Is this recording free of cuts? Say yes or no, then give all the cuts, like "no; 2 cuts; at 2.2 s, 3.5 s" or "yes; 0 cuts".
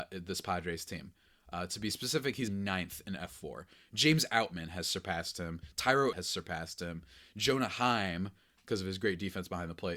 no; 2 cuts; at 2.5 s, 6.1 s